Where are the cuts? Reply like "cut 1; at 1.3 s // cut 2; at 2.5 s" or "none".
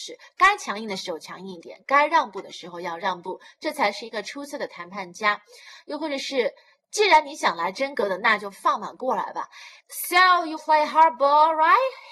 cut 1; at 9.8 s // cut 2; at 10.6 s